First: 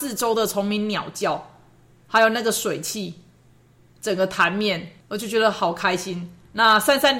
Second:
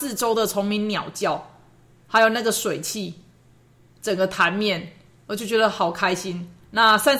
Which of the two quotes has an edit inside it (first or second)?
first